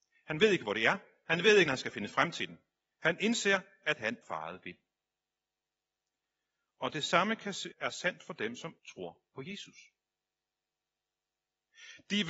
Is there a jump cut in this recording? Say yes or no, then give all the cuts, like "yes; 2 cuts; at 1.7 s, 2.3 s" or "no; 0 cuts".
yes; 4 cuts; at 1.7 s, 4.2 s, 7.7 s, 8.8 s